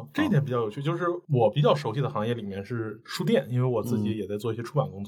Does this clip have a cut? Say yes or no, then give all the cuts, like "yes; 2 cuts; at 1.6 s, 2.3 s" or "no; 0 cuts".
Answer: no; 0 cuts